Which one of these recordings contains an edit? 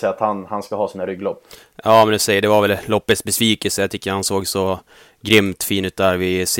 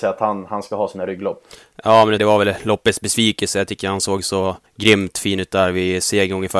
second; 2 cuts; at 2.2 s, 4.7 s

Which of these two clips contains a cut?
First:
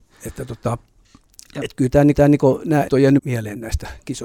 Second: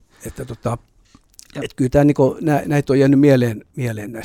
first; 3 cuts; at 2.1 s, 2.9 s, 3.2 s

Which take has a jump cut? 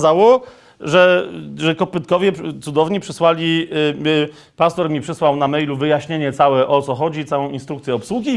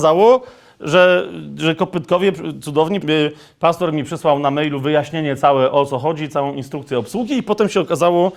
second; 1 cut; at 3.0 s

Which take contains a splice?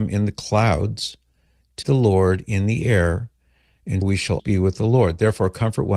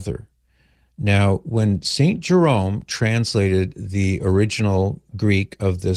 first; 3 cuts; at 1.8 s, 4.0 s, 4.4 s

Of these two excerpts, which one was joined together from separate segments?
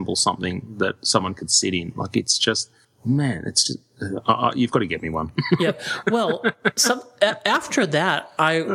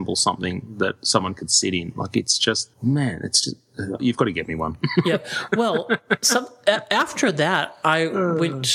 second; 2 cuts; at 2.7 s, 4.0 s

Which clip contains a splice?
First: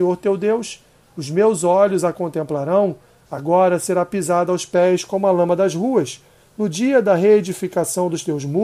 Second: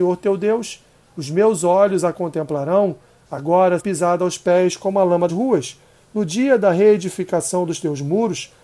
second; 2 cuts; at 3.8 s, 5.3 s

